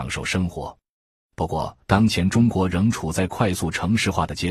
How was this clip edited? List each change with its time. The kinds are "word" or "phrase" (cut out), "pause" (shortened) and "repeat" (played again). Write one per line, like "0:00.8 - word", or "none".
0:01.8 - pause